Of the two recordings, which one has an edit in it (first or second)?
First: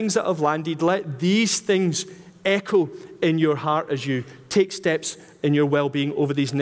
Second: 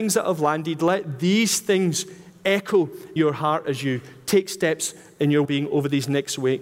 second